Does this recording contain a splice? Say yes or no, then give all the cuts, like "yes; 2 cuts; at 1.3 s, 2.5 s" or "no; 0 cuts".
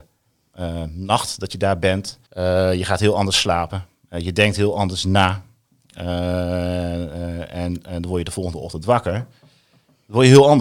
yes; 1 cut; at 2.3 s